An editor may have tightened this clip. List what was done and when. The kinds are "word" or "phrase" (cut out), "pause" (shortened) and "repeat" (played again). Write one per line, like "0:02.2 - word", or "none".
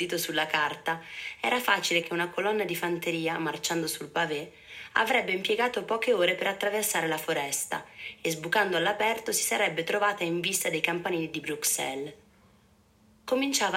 0:02.0 - word